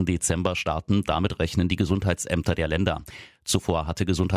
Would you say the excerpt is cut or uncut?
uncut